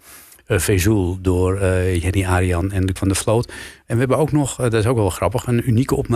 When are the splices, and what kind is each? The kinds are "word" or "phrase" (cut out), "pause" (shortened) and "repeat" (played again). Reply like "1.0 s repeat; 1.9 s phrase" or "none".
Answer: 3.0 s word